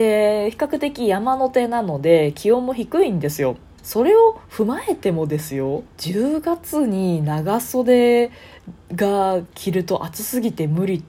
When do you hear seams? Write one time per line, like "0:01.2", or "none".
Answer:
0:03.8
0:05.9